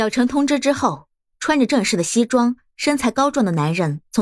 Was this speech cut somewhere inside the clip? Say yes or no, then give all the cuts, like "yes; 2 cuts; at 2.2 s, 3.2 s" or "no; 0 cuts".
no; 0 cuts